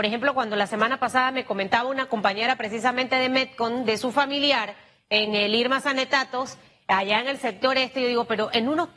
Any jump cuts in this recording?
no; 0 cuts

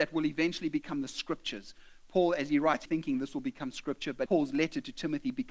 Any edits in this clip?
yes; 2 cuts; at 2.9 s, 4.3 s

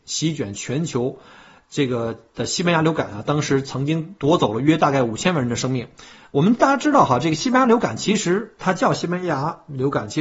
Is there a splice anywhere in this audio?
yes; 1 cut; at 4.2 s

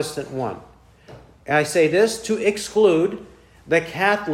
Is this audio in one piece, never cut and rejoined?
yes; 0 cuts

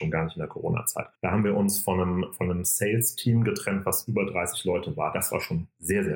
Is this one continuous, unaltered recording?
no; 1 cut; at 1.1 s

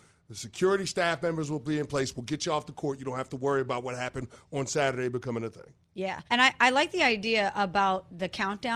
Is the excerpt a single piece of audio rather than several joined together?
no; 1 cut; at 6.3 s

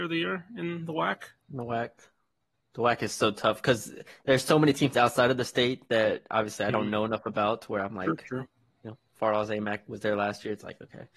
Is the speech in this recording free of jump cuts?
yes; 0 cuts

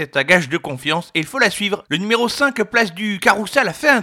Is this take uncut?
yes; 0 cuts

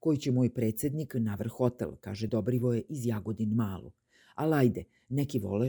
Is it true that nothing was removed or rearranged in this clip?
yes; 0 cuts

